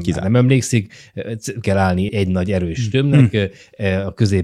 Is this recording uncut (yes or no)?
no